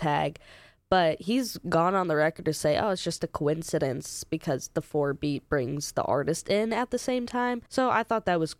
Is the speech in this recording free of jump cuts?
no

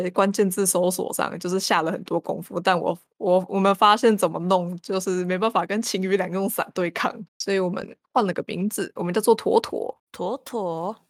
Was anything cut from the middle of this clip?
yes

